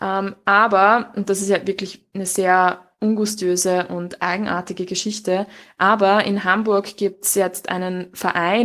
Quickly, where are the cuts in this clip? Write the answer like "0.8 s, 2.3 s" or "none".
none